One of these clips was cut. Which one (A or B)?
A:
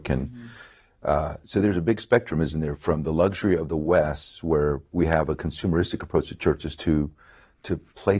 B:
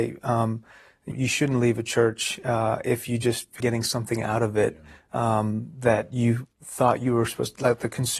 B